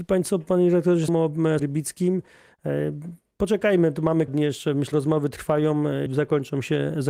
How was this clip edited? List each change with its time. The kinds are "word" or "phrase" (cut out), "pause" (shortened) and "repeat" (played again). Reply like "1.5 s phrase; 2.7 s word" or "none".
1.1 s word; 1.6 s word; 4.3 s word; 4.9 s word; 6.1 s word